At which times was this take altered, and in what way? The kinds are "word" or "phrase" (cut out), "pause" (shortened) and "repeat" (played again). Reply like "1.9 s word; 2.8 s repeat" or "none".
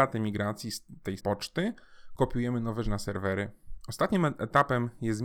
1.2 s word; 2.8 s word